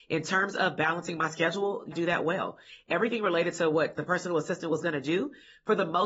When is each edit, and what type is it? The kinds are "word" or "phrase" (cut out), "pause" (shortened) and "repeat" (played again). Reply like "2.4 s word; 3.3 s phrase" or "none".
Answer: 1.9 s phrase